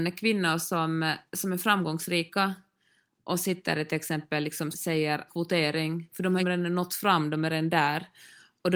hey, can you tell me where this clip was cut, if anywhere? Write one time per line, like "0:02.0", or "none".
0:01.3
0:04.7
0:05.3
0:06.4